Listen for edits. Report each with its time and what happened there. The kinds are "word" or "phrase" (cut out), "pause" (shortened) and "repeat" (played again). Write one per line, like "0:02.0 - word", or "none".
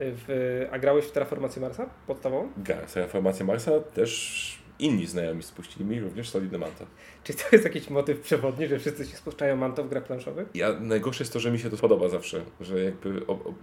0:04.7 - pause
0:05.4 - phrase
0:11.8 - word